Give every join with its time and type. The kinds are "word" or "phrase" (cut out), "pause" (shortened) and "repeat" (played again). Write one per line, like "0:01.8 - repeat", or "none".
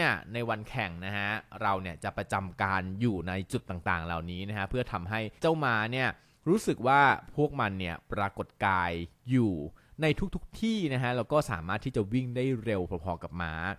0:05.4 - pause